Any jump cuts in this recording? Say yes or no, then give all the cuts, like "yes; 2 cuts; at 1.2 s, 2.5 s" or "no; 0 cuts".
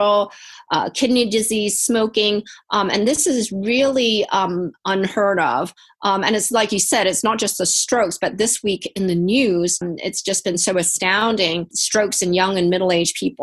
no; 0 cuts